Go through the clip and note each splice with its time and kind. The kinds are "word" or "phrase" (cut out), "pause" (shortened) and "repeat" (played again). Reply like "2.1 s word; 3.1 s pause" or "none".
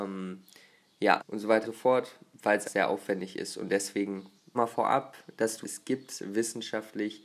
1.2 s word; 1.6 s word; 2.6 s word; 4.5 s word; 5.6 s word